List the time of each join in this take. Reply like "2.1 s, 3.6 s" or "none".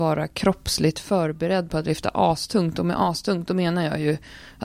none